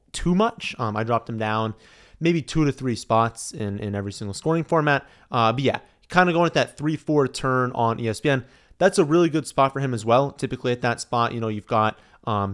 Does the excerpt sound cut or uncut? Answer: uncut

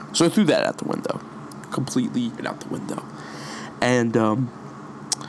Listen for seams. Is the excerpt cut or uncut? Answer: cut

